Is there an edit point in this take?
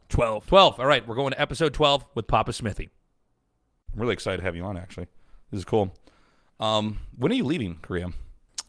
no; 0 cuts

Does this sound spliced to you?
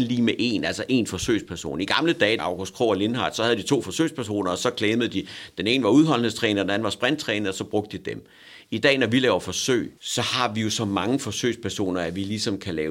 yes; 2 cuts; at 2.4 s, 10.0 s

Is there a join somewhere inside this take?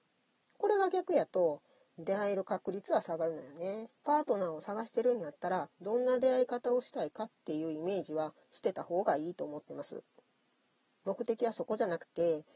yes; 3 cuts; at 4.0 s, 5.7 s, 8.4 s

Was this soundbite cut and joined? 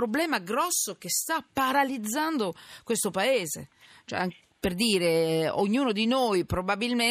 no; 0 cuts

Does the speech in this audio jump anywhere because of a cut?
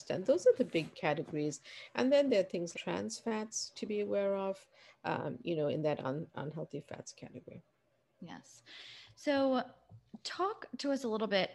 yes; 2 cuts; at 2.7 s, 10.2 s

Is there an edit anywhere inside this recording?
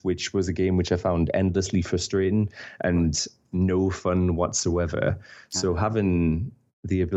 no; 0 cuts

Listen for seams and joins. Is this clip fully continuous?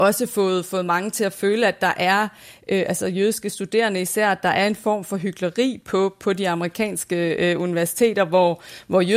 yes; 0 cuts

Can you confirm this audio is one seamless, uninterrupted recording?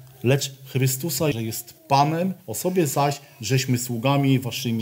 no; 2 cuts; at 1.3 s, 2.4 s

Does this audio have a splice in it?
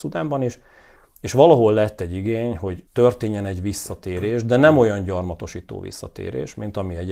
yes; 1 cut; at 2.9 s

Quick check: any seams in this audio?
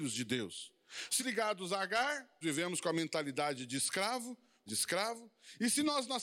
yes; 3 cuts; at 1.2 s, 2.4 s, 4.7 s

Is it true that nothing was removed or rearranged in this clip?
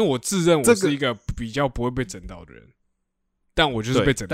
yes; 0 cuts

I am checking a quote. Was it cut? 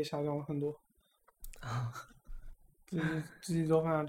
no; 0 cuts

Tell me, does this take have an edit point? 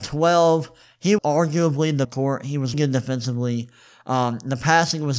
yes; 3 cuts; at 1.2 s, 2.0 s, 2.7 s

